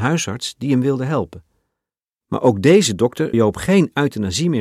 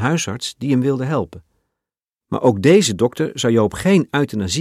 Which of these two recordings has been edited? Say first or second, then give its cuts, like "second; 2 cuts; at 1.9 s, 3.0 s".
first; 1 cut; at 3.3 s